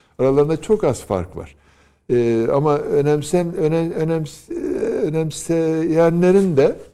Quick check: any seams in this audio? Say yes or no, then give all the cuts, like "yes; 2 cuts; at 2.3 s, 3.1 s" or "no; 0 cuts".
no; 0 cuts